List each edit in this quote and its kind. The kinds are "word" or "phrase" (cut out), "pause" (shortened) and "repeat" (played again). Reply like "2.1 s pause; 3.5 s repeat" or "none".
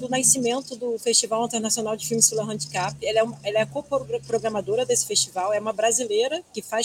none